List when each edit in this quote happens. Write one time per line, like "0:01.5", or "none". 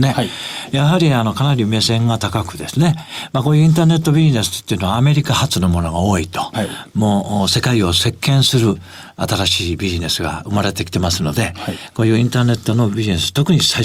none